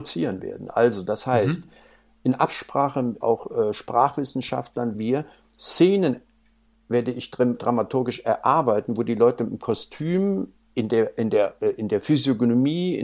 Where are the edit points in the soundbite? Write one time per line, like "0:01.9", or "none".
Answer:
0:03.2
0:04.9
0:07.6